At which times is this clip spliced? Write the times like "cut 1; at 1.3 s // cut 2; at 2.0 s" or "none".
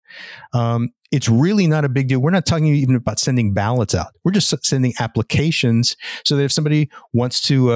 none